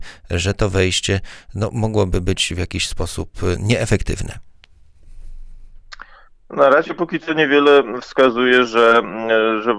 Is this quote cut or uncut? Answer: uncut